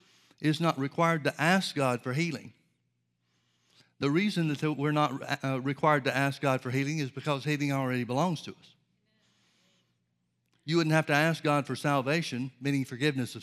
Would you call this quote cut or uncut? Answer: uncut